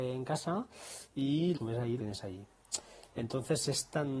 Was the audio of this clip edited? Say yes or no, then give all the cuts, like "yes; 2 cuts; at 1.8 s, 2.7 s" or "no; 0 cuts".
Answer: yes; 2 cuts; at 1.5 s, 2.0 s